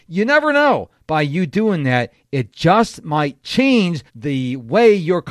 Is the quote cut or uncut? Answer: cut